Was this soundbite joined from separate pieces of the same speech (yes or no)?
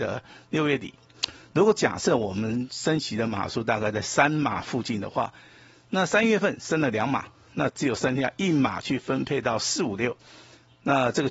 no